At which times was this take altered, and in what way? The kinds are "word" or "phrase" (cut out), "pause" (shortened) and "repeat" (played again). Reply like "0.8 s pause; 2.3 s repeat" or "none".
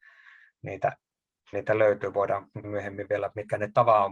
1.5 s word; 2.6 s word